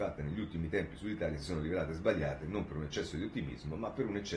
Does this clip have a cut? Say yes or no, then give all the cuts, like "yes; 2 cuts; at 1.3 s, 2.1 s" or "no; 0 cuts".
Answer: no; 0 cuts